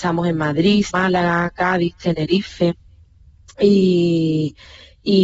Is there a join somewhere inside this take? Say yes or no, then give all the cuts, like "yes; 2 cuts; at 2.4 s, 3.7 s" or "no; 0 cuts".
yes; 1 cut; at 0.9 s